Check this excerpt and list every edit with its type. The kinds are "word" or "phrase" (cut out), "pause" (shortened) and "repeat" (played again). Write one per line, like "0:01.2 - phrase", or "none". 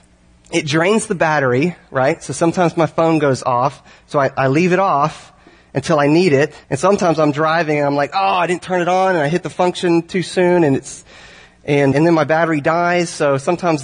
0:06.6 - pause
0:11.9 - word